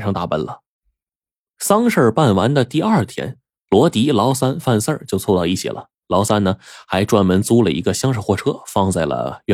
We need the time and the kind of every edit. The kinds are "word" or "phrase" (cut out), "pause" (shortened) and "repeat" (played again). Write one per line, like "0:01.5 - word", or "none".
none